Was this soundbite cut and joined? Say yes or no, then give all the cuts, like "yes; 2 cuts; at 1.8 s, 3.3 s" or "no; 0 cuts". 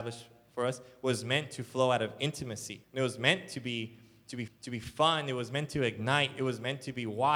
yes; 2 cuts; at 2.8 s, 4.5 s